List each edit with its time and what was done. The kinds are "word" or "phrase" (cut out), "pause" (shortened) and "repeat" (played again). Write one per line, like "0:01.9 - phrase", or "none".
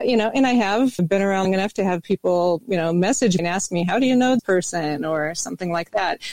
0:01.0 - word
0:01.4 - word
0:03.4 - word
0:04.4 - word